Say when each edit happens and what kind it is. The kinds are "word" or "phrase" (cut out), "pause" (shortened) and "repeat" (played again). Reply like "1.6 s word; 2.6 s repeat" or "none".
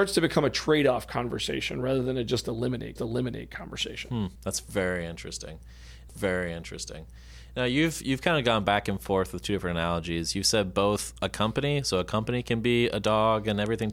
3.0 s repeat; 4.4 s pause; 6.1 s repeat